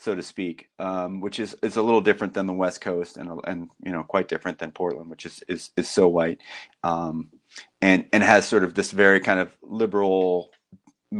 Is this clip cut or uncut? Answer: uncut